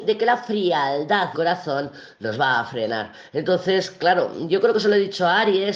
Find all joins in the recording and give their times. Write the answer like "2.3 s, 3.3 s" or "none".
1.3 s